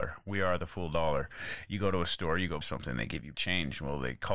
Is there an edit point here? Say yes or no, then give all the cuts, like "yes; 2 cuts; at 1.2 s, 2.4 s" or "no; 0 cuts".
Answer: yes; 2 cuts; at 2.6 s, 3.3 s